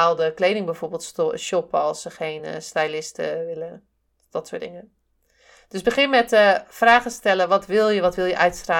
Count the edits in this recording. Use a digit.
0